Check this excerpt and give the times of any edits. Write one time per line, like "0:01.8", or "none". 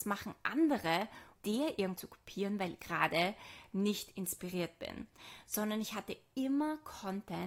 0:01.3
0:01.9
0:02.8

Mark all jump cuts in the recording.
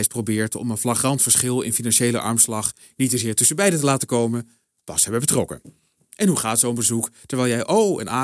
none

